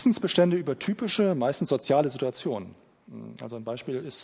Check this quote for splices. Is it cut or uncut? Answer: uncut